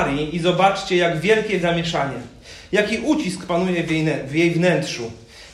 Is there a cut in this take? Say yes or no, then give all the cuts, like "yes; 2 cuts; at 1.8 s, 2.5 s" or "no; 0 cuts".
yes; 1 cut; at 1.6 s